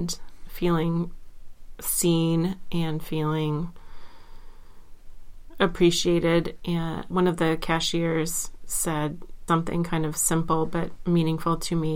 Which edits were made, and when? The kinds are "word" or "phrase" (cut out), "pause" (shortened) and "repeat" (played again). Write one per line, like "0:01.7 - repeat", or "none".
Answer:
0:07.1 - word
0:09.5 - word